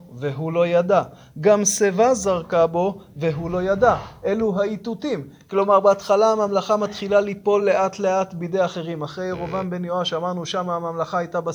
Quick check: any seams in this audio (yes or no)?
no